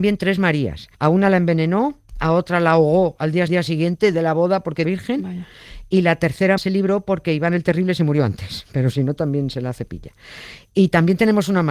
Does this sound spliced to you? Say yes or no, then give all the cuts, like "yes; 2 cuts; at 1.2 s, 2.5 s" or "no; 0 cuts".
yes; 4 cuts; at 0.9 s, 3.5 s, 4.8 s, 6.6 s